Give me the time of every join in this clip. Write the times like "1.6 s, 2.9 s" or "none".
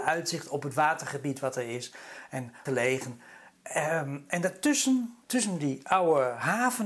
2.7 s, 5.2 s